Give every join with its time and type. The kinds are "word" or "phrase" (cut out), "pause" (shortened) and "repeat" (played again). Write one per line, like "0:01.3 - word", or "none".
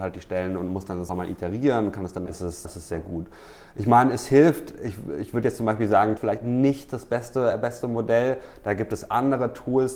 0:01.1 - phrase
0:02.3 - phrase
0:02.6 - word
0:06.2 - phrase